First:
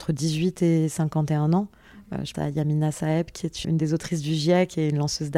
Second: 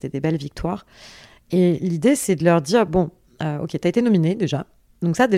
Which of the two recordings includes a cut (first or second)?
first